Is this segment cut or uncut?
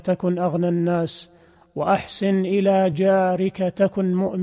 uncut